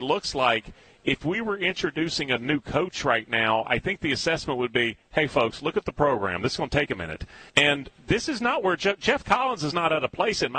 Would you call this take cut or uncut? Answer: cut